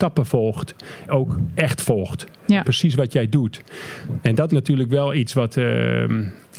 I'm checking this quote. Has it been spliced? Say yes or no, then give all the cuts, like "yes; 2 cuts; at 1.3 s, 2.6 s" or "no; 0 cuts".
yes; 3 cuts; at 1.1 s, 2.6 s, 4.5 s